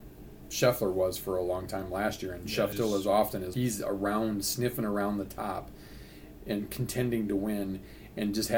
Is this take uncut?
no; 2 cuts; at 2.7 s, 3.5 s

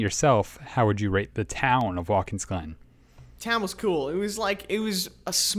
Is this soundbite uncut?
yes; 0 cuts

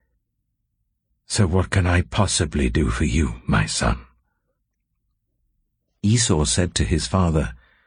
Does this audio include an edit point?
no; 0 cuts

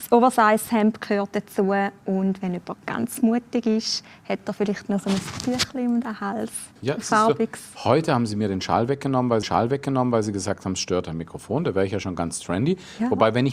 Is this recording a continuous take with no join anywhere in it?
no; 2 cuts; at 6.8 s, 9.4 s

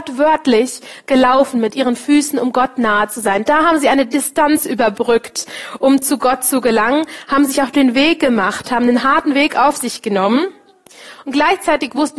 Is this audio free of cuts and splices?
yes; 0 cuts

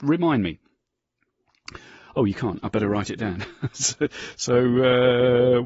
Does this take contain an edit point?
no; 0 cuts

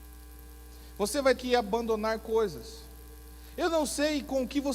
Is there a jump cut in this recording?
yes; 1 cut; at 1.4 s

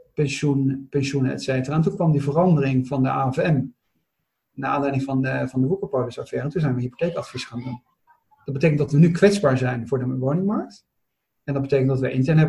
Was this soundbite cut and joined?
no; 0 cuts

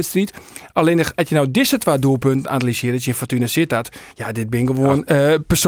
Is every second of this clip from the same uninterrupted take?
no; 1 cut; at 4.1 s

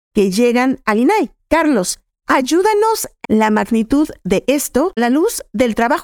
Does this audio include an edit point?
yes; 2 cuts; at 3.2 s, 5.0 s

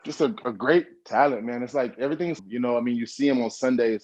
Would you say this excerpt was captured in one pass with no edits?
no; 1 cut; at 2.4 s

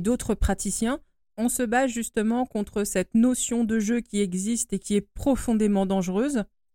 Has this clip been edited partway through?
no; 0 cuts

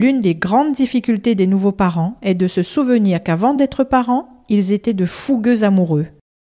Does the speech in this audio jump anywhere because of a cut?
no; 0 cuts

